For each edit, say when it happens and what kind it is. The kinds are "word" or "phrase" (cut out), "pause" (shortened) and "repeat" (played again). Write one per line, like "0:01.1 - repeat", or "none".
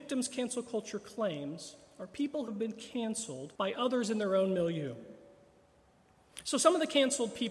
0:02.5 - word
0:03.6 - pause